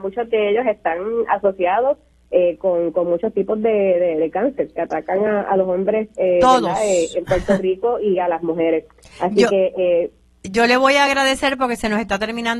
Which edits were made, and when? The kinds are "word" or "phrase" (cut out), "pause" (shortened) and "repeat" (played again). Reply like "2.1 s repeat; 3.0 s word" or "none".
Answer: none